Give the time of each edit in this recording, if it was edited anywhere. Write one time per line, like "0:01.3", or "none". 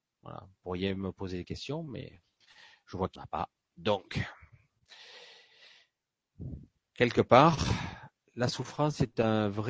0:03.2